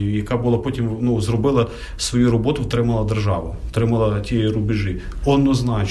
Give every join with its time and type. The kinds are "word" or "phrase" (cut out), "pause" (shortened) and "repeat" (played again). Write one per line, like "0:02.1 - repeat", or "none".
none